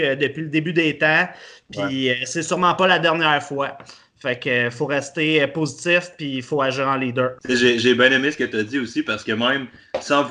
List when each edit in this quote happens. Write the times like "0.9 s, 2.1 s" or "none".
7.4 s